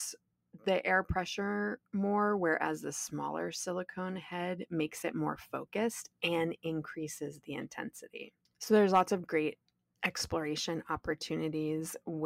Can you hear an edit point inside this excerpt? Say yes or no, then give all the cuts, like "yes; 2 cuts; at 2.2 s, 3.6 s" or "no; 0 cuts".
no; 0 cuts